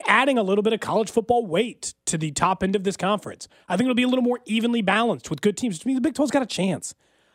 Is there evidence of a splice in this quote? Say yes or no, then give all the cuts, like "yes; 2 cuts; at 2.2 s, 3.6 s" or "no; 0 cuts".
no; 0 cuts